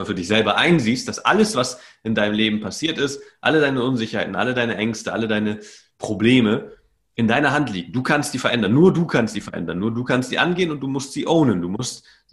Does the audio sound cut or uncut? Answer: uncut